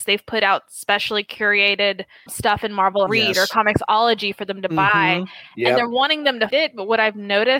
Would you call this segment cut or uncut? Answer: cut